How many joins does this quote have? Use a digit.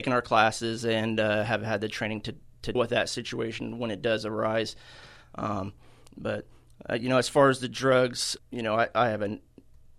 2